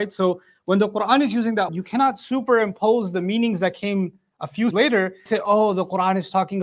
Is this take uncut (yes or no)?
no